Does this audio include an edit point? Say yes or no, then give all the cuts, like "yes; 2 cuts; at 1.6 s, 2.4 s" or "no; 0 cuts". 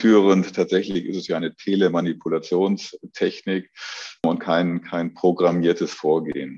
no; 0 cuts